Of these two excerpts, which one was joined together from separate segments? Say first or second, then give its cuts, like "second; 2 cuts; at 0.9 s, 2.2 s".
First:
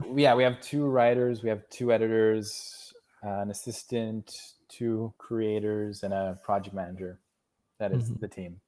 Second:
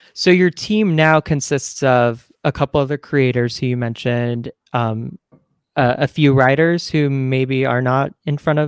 first; 1 cut; at 5.2 s